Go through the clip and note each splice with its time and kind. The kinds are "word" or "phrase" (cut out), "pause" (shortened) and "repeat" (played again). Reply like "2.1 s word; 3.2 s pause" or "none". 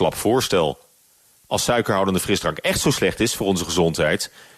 none